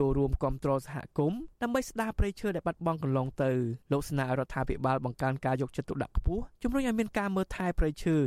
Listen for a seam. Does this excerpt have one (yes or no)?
yes